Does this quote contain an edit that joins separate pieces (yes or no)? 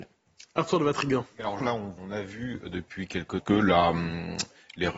yes